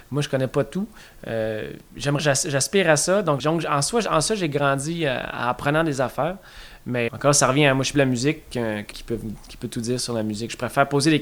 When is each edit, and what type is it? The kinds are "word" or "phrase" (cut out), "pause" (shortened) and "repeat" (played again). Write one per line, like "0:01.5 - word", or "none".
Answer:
0:02.2 - word
0:03.4 - word
0:07.1 - word
0:07.9 - phrase
0:08.9 - word